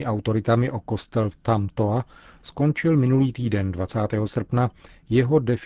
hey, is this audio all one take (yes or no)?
yes